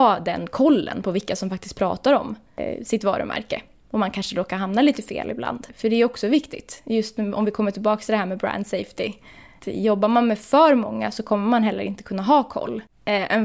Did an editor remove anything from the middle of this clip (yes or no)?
no